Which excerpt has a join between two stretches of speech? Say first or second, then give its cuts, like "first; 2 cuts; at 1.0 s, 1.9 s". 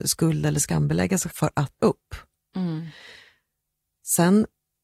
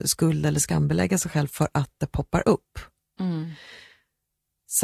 first; 2 cuts; at 1.3 s, 1.8 s